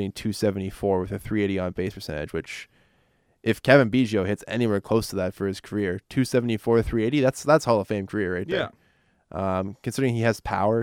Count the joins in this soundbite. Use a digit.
0